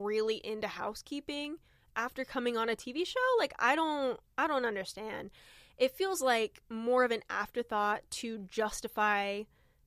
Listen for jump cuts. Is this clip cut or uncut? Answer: uncut